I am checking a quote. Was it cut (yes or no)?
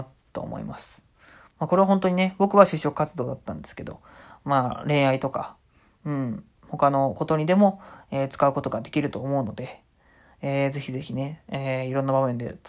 no